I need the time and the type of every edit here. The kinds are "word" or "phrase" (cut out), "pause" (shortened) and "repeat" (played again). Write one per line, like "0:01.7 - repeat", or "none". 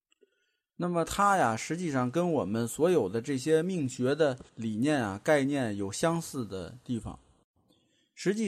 0:04.5 - pause